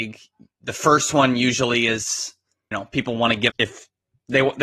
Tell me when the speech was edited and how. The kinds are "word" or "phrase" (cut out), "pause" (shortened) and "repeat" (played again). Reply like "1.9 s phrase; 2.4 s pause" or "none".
2.7 s word; 3.5 s word